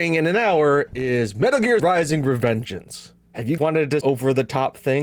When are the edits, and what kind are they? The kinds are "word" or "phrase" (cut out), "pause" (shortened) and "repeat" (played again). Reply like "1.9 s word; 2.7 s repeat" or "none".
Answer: 1.8 s word; 3.2 s pause; 3.6 s word; 4.0 s word